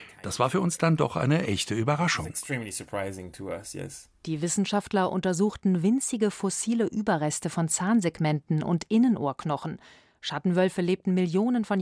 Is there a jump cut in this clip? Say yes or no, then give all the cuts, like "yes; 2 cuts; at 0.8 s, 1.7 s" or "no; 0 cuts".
no; 0 cuts